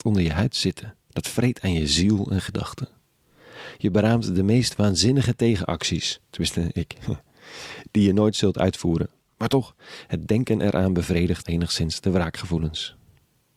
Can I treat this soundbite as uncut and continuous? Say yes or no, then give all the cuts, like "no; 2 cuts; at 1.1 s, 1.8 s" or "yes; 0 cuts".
no; 2 cuts; at 6.2 s, 11.4 s